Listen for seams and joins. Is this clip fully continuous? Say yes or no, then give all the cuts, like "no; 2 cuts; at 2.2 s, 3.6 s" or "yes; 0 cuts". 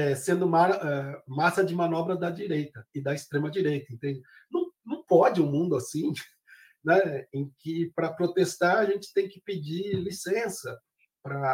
yes; 0 cuts